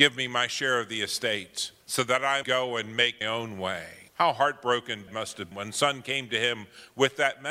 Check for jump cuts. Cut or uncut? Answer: cut